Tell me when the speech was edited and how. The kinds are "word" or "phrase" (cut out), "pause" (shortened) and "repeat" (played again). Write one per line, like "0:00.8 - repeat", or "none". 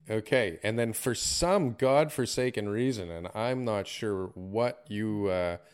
none